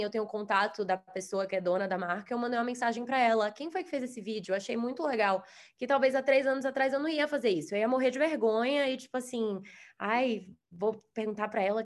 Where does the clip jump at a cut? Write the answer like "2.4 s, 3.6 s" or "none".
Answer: none